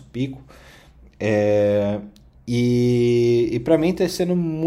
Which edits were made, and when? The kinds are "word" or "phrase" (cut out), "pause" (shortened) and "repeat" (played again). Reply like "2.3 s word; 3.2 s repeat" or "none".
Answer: none